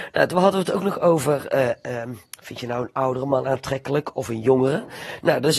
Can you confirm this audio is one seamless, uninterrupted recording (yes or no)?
yes